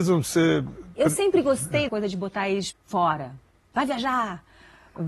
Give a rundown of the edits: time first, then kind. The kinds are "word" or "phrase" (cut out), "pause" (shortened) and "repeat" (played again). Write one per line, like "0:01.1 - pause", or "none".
0:01.9 - word
0:02.7 - word